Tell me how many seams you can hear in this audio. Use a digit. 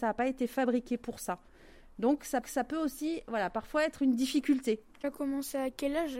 2